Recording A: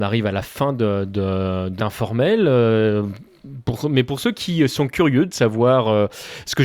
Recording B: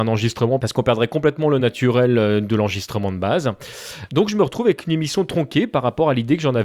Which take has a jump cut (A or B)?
A